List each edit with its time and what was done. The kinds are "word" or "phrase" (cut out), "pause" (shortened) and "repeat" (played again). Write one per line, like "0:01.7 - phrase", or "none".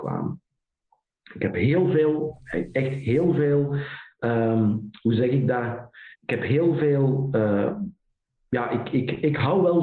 0:06.1 - pause
0:08.2 - pause